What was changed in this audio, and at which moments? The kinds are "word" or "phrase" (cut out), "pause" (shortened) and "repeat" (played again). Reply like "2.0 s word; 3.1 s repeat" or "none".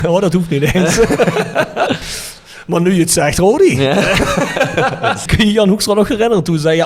none